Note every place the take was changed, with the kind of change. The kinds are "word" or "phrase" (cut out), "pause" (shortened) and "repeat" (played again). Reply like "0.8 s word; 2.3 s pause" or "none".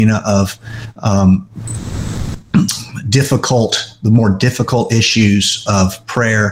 none